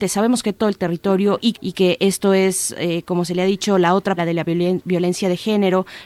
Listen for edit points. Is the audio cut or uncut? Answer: cut